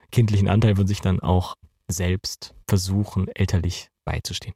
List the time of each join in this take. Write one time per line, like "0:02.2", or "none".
0:01.0
0:02.6